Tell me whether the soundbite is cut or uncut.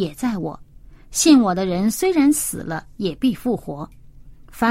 uncut